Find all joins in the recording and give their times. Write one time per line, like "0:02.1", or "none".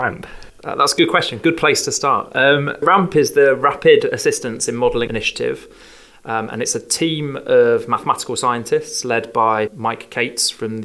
0:02.8
0:05.1
0:09.7